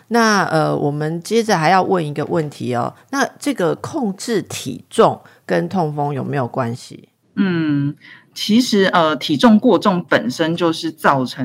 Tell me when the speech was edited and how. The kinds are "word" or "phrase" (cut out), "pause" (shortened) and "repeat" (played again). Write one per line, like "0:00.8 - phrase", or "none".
none